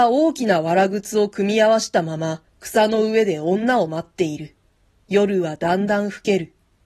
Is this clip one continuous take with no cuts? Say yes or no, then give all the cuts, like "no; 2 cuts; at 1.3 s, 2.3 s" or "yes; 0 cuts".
no; 2 cuts; at 2.5 s, 4.8 s